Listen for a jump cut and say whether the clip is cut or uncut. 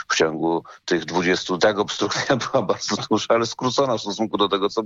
cut